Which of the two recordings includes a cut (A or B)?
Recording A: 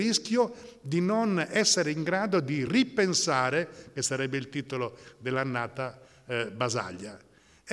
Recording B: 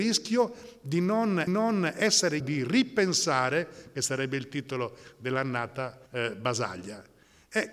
B